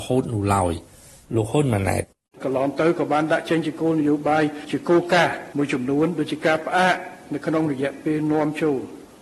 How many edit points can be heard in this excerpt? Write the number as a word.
zero